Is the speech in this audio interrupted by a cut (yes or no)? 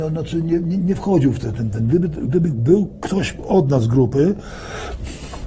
no